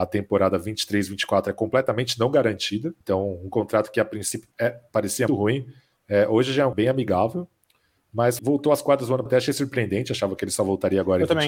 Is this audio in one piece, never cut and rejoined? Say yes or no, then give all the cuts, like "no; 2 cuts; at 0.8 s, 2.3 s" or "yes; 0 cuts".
no; 6 cuts; at 3.0 s, 4.5 s, 5.3 s, 6.7 s, 8.4 s, 9.3 s